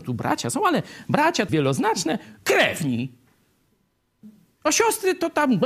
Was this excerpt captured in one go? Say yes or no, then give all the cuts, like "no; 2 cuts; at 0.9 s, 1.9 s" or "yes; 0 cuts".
no; 2 cuts; at 1.5 s, 4.5 s